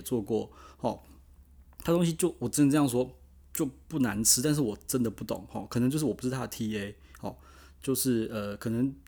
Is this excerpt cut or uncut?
uncut